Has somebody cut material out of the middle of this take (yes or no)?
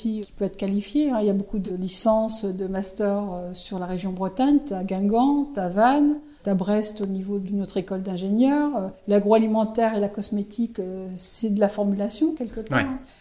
no